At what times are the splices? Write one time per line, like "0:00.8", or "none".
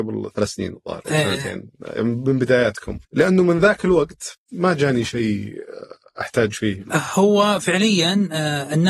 0:03.0
0:04.4